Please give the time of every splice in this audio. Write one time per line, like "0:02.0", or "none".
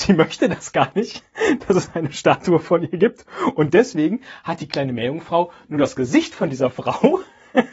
none